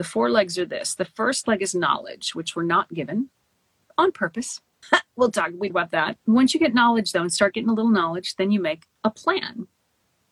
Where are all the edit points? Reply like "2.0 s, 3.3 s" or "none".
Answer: 5.7 s